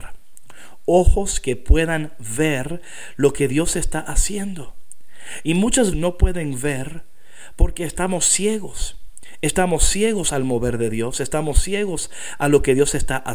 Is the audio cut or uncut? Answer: cut